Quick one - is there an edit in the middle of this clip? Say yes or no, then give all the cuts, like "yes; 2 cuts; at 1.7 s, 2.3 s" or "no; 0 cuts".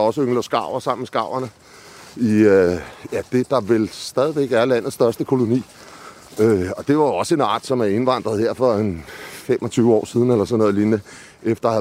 no; 0 cuts